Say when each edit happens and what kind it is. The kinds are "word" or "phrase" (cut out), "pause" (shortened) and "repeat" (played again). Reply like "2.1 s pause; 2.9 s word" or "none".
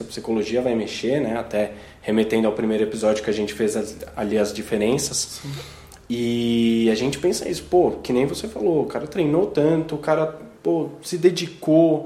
10.6 s pause